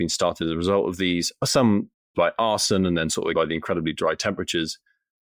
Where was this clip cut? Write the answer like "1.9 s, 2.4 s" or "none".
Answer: 2.1 s, 3.3 s